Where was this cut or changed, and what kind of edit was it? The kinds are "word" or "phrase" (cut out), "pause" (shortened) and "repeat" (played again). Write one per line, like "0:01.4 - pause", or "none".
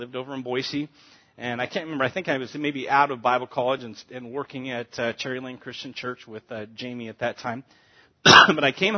none